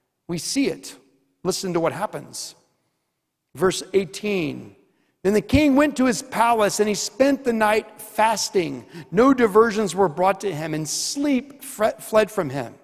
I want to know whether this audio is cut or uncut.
uncut